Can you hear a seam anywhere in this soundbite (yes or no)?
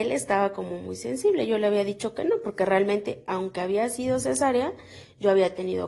no